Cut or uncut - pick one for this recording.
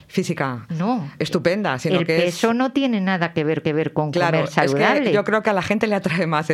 cut